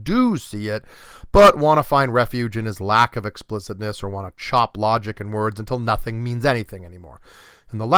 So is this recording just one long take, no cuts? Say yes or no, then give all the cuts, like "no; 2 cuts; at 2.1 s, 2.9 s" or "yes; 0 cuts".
yes; 0 cuts